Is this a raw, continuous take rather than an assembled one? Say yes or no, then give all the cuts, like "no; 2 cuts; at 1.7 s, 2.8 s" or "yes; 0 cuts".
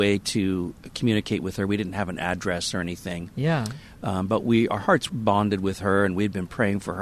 no; 1 cut; at 5.1 s